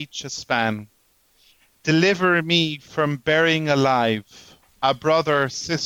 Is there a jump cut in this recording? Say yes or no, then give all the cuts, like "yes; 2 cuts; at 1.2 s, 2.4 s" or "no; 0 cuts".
no; 0 cuts